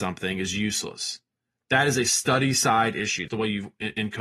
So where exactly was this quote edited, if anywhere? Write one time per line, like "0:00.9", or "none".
0:03.3